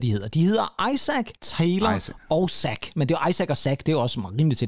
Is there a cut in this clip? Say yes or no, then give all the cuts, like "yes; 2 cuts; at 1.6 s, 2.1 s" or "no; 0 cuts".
yes; 1 cut; at 1.4 s